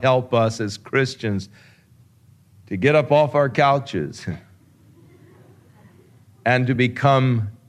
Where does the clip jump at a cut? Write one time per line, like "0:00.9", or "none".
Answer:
none

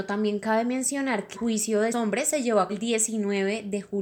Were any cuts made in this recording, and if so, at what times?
0:01.3
0:01.9
0:02.7

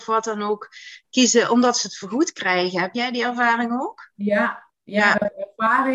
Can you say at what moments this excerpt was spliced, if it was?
none

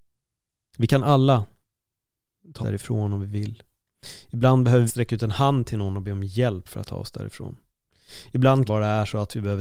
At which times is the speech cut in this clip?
0:02.6
0:04.9
0:06.9
0:08.7

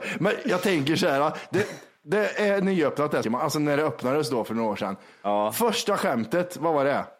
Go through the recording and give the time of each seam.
0:03.2

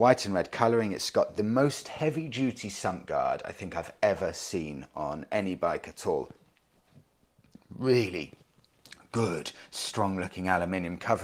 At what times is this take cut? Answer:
none

